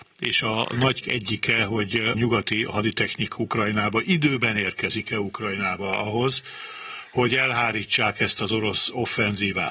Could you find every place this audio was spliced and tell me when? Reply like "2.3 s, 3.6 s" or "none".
1.0 s, 2.1 s, 3.4 s